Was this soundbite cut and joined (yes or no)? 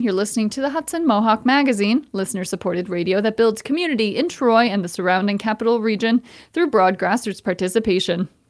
no